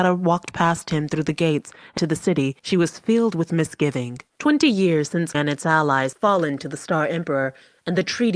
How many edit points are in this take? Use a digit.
5